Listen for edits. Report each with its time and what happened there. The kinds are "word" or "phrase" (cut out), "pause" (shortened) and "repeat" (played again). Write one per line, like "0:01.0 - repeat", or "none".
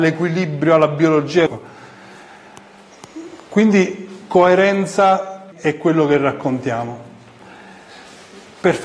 0:01.5 - phrase
0:05.5 - phrase